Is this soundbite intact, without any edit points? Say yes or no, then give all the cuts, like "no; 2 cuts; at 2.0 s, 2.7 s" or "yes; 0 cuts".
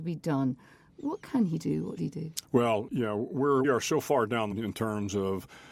no; 4 cuts; at 2.0 s, 2.9 s, 3.6 s, 4.5 s